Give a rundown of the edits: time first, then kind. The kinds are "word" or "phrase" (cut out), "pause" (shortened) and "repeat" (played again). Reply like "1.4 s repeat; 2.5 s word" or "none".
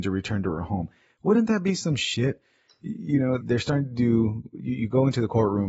3.4 s word